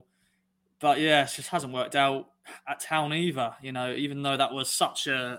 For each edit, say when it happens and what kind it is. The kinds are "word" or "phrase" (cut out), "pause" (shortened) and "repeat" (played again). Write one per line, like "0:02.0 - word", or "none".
none